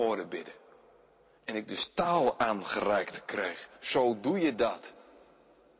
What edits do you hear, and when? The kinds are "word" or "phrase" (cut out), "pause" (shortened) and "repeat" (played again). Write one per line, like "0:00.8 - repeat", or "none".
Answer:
none